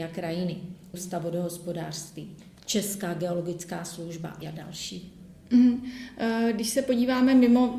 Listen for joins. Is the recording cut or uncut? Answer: cut